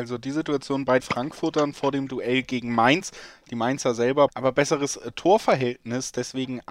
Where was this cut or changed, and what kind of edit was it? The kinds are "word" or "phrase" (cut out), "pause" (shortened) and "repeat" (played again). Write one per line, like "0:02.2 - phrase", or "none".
0:01.0 - word
0:04.3 - word